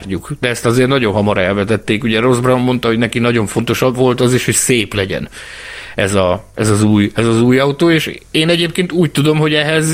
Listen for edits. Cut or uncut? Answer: uncut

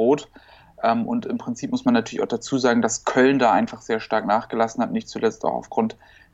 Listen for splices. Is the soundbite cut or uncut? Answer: uncut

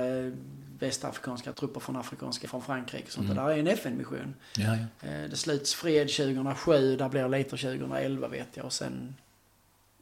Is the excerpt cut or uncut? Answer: cut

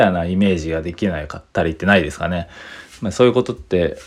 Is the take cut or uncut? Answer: cut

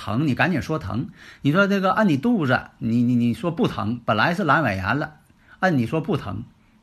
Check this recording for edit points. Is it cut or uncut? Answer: uncut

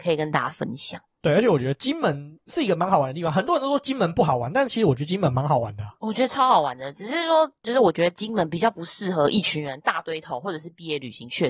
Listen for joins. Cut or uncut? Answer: uncut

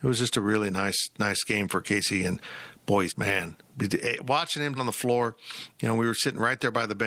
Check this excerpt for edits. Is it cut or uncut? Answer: cut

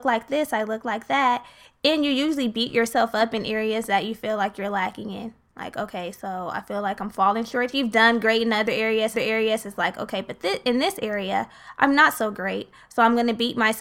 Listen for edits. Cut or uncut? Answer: cut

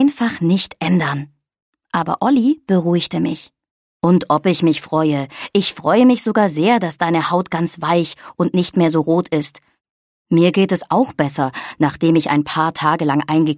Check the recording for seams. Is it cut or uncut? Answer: uncut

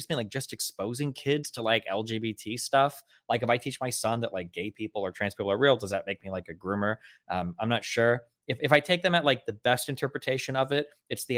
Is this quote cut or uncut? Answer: uncut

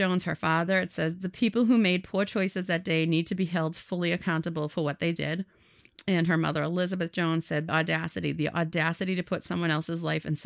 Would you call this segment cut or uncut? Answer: cut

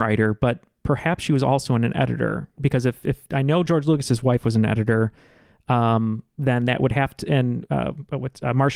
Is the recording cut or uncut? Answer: uncut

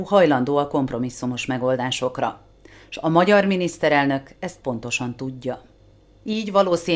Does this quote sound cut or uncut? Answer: uncut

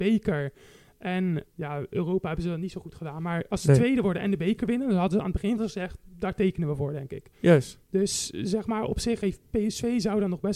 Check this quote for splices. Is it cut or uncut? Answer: cut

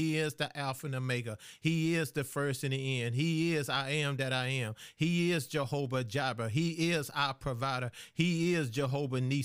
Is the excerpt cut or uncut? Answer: uncut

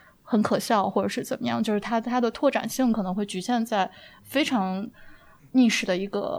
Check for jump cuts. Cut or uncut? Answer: uncut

